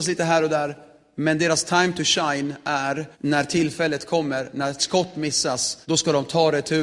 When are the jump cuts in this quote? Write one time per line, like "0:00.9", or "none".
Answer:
0:03.1
0:05.8